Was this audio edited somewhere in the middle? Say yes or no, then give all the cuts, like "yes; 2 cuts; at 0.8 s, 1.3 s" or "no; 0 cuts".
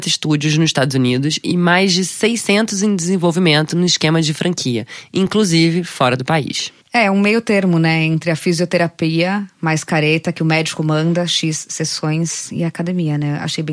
no; 0 cuts